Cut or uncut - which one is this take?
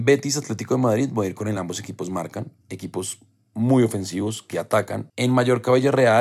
uncut